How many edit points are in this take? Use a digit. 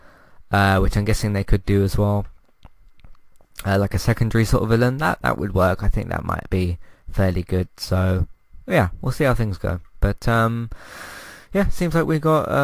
0